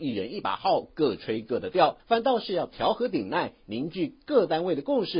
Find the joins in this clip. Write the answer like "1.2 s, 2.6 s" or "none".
2.0 s

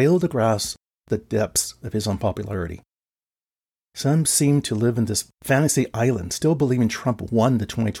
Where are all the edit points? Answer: none

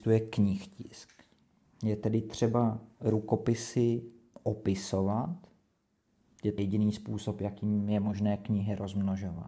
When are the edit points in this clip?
6.6 s

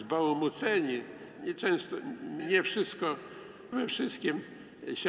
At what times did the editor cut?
1.4 s, 2.4 s, 3.7 s

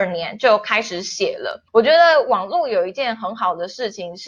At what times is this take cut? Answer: 1.7 s

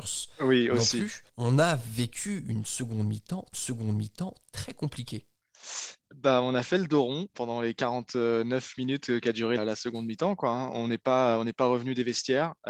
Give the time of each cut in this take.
1.3 s, 3.5 s, 7.3 s, 9.6 s

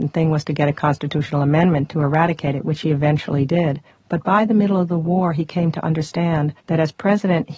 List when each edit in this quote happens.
3.9 s, 6.6 s

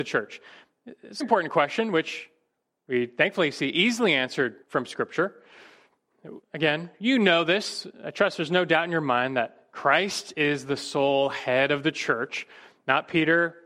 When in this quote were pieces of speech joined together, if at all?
1.2 s, 4.6 s, 6.4 s

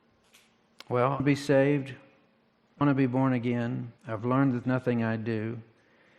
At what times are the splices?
1.2 s, 2.8 s, 4.0 s, 4.6 s

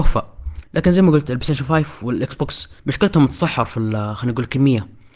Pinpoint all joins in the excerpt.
2.8 s

